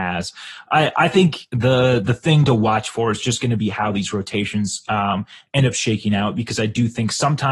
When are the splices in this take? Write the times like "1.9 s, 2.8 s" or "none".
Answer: none